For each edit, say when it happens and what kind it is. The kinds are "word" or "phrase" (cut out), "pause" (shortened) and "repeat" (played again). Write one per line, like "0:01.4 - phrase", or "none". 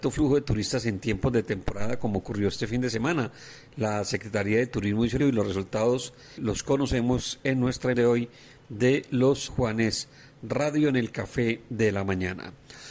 0:05.2 - word
0:06.4 - word
0:07.9 - word
0:09.5 - word